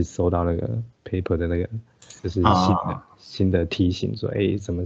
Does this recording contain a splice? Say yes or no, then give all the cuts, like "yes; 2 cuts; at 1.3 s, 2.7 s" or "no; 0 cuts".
yes; 2 cuts; at 0.9 s, 2.2 s